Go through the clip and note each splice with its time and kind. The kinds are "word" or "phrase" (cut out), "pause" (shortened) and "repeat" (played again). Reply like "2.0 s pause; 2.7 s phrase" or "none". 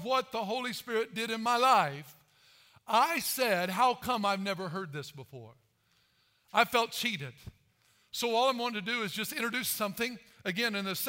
none